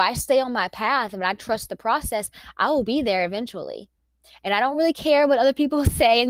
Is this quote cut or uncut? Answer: uncut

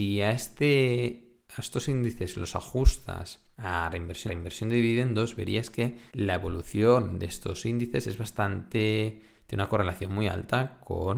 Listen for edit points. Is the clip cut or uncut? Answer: cut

